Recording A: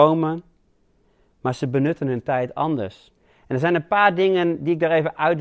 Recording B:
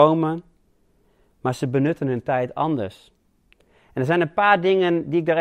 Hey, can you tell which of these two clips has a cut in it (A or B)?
A